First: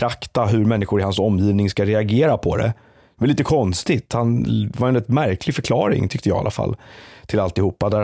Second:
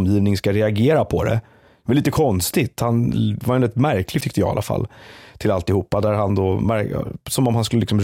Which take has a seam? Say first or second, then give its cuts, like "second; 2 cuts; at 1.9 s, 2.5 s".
second; 1 cut; at 4.2 s